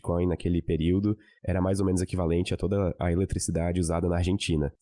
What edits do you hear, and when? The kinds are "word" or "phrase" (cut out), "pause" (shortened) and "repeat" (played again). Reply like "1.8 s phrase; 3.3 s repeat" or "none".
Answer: none